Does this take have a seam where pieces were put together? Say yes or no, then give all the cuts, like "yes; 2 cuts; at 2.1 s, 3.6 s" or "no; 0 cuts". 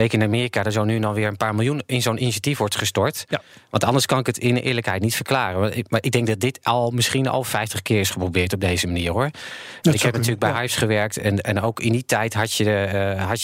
no; 0 cuts